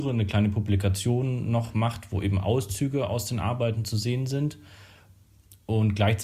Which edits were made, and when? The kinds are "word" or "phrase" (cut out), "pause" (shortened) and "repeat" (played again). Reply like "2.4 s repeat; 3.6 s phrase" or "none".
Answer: none